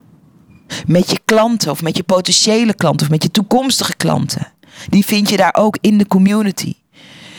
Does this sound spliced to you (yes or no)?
no